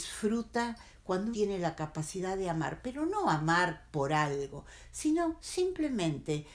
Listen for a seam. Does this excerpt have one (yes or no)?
yes